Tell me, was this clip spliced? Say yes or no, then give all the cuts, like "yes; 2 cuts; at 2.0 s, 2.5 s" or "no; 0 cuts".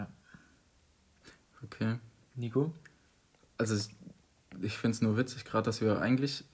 no; 0 cuts